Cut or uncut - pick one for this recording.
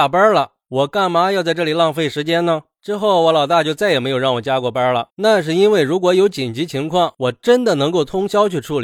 cut